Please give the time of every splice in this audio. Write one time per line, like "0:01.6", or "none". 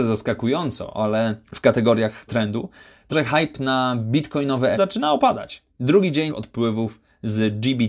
0:01.4
0:02.3
0:03.1
0:04.7
0:05.7
0:06.3

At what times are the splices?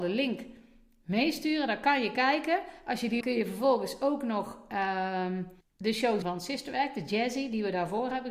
0:03.2
0:05.6
0:06.2

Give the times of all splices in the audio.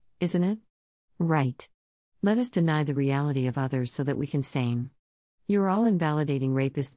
0:04.4

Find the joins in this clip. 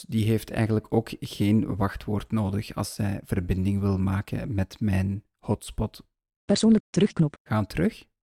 0:06.8

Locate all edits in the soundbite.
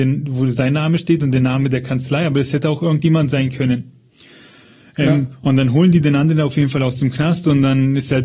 none

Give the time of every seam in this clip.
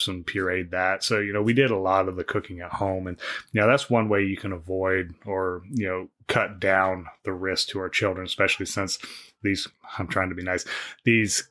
none

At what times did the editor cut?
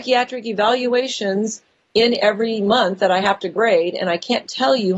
none

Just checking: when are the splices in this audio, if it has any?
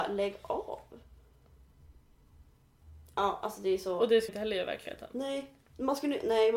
0:04.3

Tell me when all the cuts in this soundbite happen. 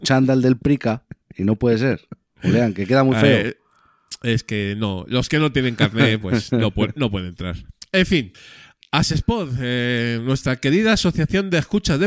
none

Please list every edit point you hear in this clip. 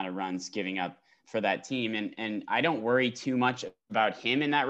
0:01.2

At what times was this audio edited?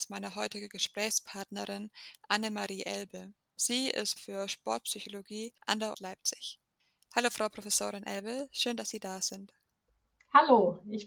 0:04.2
0:05.9

